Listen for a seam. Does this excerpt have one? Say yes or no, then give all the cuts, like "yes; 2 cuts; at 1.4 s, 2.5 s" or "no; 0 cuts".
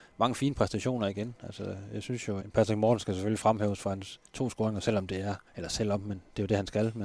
yes; 2 cuts; at 2.4 s, 5.5 s